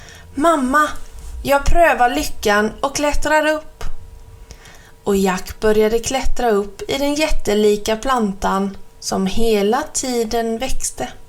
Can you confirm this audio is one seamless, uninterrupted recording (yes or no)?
yes